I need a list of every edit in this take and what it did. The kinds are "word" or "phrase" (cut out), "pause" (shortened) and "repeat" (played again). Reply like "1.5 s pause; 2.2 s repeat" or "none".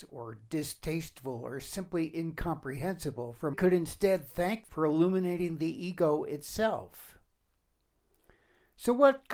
3.5 s phrase; 4.7 s word